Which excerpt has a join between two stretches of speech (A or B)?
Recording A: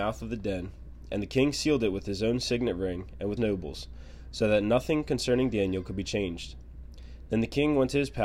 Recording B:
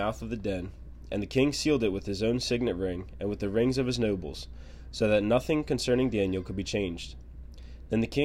A